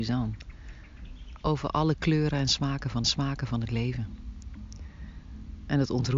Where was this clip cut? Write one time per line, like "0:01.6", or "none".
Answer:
0:03.0